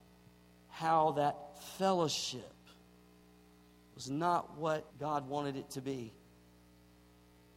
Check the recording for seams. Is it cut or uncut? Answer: cut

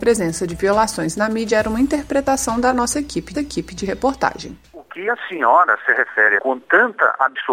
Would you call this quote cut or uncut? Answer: cut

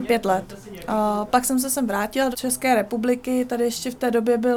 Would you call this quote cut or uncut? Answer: cut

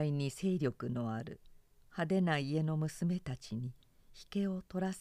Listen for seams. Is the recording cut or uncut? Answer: uncut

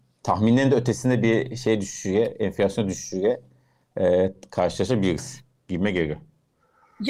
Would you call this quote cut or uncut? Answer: uncut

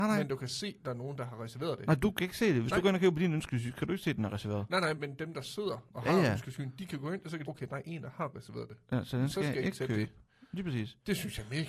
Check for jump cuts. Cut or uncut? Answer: cut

